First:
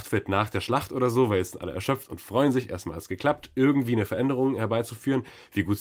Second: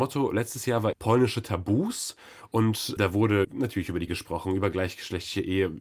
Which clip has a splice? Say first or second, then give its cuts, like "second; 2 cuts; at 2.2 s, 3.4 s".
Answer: second; 4 cuts; at 0.9 s, 3.0 s, 3.4 s, 4.1 s